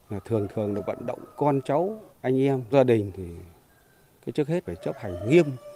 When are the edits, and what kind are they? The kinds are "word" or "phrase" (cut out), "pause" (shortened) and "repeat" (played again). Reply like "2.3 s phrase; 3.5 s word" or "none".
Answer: 1.3 s pause; 2.1 s pause; 2.7 s phrase; 4.7 s word